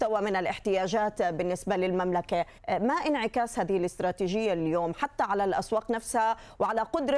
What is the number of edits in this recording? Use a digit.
1